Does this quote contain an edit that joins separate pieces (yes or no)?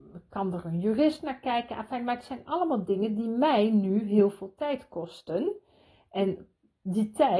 no